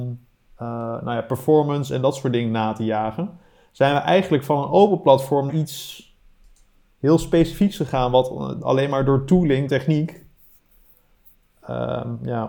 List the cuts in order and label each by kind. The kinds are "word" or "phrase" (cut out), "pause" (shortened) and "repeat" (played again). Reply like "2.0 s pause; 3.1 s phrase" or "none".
5.5 s word; 9.7 s word